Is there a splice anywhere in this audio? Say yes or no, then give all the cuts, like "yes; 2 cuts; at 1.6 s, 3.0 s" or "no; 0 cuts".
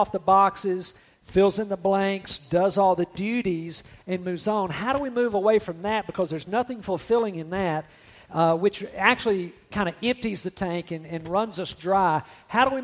no; 0 cuts